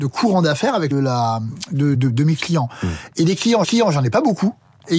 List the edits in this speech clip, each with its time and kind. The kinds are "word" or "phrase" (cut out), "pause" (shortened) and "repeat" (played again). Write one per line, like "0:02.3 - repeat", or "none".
0:00.9 - phrase
0:01.9 - word
0:03.6 - repeat